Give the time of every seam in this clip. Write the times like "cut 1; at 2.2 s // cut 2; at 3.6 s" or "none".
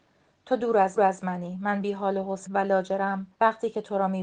cut 1; at 1.0 s // cut 2; at 2.5 s // cut 3; at 3.3 s